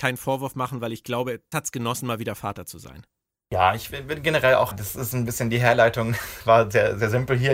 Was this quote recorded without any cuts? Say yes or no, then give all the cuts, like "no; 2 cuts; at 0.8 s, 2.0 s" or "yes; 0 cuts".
no; 2 cuts; at 1.5 s, 4.7 s